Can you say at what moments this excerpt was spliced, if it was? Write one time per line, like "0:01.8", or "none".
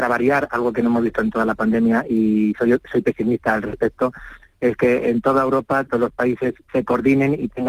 none